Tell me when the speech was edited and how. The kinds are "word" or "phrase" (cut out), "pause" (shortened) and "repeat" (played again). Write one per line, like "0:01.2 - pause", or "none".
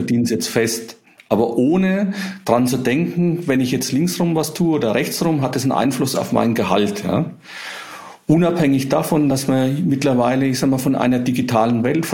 none